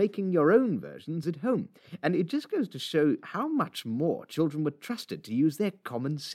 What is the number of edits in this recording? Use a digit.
1